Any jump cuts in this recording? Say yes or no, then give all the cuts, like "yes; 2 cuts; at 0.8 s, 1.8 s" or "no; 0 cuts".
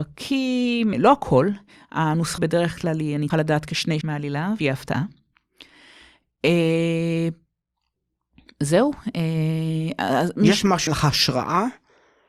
yes; 6 cuts; at 0.9 s, 2.4 s, 3.3 s, 4.0 s, 4.6 s, 10.9 s